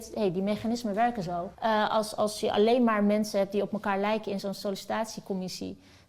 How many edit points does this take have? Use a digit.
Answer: 1